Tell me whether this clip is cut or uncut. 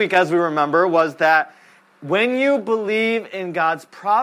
uncut